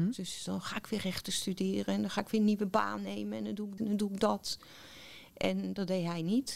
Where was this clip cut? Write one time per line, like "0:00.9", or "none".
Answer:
0:03.8